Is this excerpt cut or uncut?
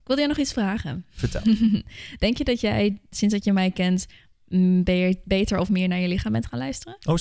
uncut